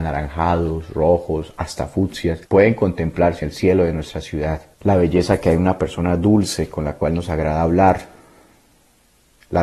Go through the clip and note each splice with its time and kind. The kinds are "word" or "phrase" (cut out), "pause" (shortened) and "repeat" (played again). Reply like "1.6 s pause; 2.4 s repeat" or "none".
2.5 s pause; 3.4 s word; 4.7 s pause